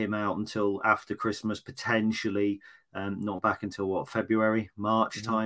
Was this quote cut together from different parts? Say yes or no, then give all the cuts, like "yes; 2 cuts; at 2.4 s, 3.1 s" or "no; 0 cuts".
no; 0 cuts